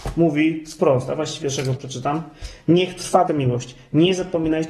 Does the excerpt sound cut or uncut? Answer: cut